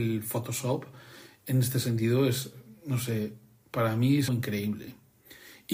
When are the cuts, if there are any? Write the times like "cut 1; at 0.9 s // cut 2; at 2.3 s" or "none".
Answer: cut 1; at 4.3 s